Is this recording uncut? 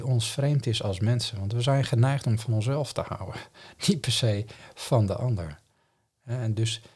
yes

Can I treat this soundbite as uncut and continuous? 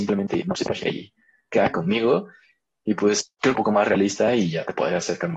no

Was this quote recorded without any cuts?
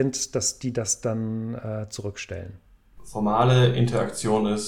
yes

